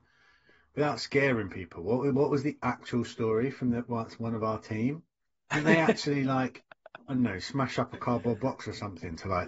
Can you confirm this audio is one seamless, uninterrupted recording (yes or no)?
yes